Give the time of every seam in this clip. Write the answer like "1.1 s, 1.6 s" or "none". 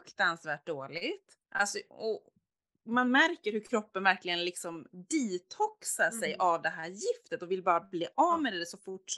1.4 s